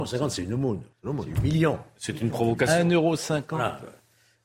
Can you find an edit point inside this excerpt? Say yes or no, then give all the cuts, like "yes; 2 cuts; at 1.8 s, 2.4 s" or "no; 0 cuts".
yes; 1 cut; at 0.9 s